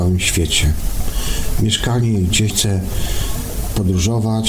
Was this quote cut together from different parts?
yes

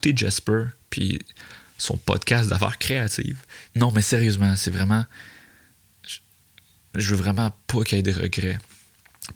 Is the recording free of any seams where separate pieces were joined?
yes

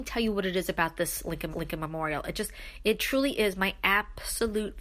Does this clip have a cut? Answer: yes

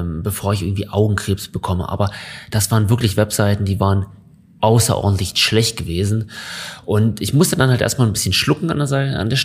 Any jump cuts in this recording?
no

